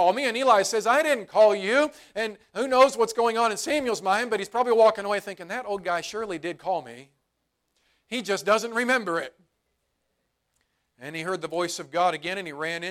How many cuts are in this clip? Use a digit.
0